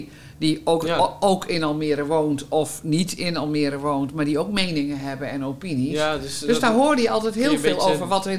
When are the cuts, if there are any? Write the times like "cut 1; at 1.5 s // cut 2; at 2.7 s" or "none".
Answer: none

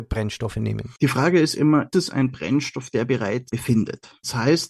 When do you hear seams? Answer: cut 1; at 1.0 s // cut 2; at 1.9 s // cut 3; at 3.5 s

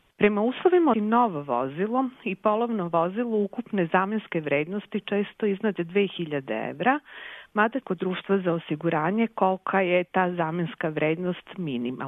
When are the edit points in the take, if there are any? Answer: cut 1; at 0.9 s // cut 2; at 7.8 s

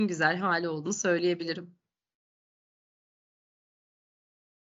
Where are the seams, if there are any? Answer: none

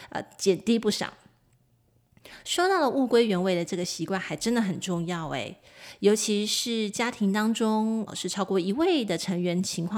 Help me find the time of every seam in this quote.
cut 1; at 8.1 s

